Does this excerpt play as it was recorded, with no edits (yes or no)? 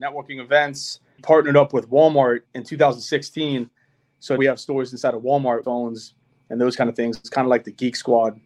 no